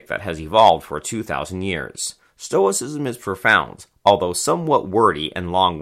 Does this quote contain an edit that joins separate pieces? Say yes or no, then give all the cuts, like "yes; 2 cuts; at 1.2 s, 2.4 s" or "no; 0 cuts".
no; 0 cuts